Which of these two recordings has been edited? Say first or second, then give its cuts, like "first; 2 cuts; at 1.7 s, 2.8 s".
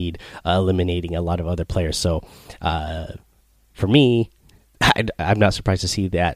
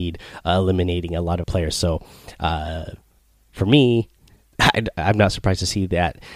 second; 1 cut; at 1.4 s